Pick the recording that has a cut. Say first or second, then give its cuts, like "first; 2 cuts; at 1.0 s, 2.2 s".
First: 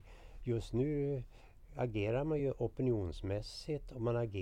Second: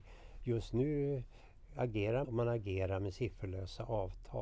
second; 1 cut; at 2.2 s